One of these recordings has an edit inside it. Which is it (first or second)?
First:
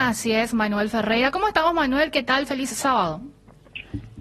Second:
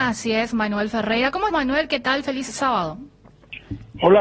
second